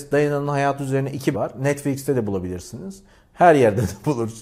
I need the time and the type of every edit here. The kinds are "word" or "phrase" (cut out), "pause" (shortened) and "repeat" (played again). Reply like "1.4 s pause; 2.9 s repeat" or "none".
1.3 s word